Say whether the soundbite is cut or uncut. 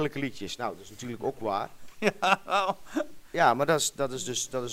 uncut